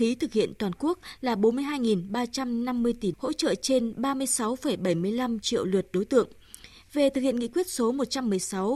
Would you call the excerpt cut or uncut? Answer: cut